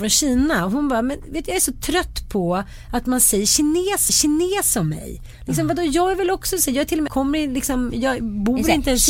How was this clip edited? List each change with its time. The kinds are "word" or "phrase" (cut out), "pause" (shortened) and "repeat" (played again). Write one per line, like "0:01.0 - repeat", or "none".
0:04.1 - repeat
0:07.1 - phrase